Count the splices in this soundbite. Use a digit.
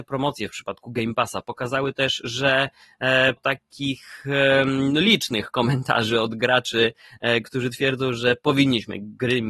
1